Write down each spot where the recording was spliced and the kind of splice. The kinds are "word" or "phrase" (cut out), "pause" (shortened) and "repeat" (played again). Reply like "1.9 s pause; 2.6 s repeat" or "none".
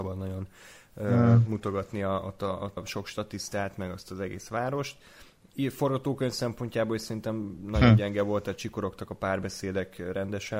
2.8 s word

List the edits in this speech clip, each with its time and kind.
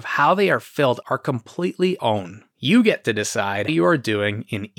1.0 s word; 2.0 s word; 3.7 s word

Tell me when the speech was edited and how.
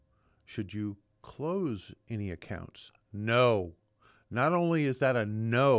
none

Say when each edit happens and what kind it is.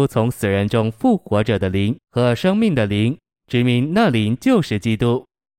2.0 s pause

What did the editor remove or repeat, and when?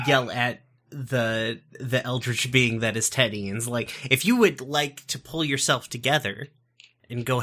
none

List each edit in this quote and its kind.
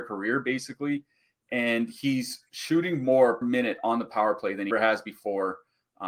3.4 s word; 4.7 s word

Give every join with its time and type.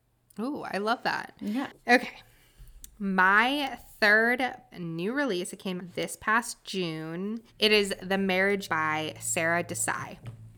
1.8 s pause; 4.7 s phrase; 5.8 s word; 7.5 s pause; 8.7 s word

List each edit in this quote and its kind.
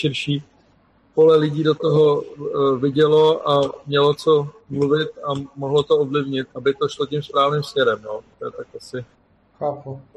6.5 s word

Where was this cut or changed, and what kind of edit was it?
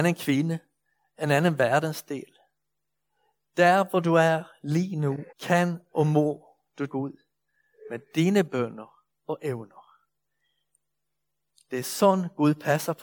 5.3 s pause; 6.9 s word; 9.1 s pause

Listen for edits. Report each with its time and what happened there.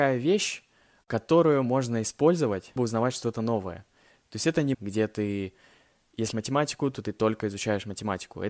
2.8 s word; 4.7 s word; 6.3 s word

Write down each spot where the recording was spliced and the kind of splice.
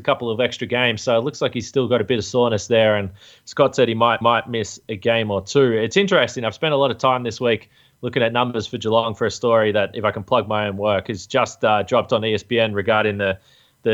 4.2 s repeat

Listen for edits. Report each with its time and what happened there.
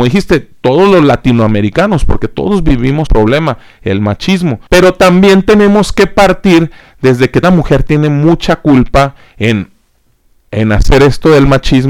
3.1 s phrase; 4.7 s pause; 7.4 s word

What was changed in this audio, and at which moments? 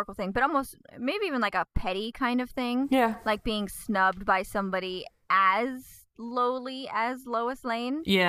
none

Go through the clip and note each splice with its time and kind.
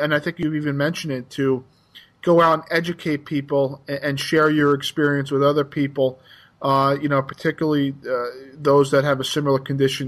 none

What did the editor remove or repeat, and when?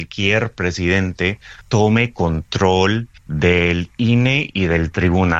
1.6 s pause; 3.2 s pause

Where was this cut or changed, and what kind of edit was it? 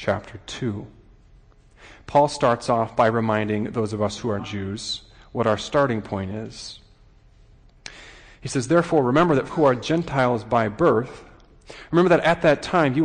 4.4 s word; 9.5 s phrase

